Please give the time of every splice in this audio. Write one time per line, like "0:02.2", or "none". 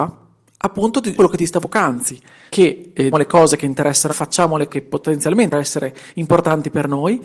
0:01.2
0:01.6
0:02.5
0:03.1
0:04.1
0:04.7
0:05.5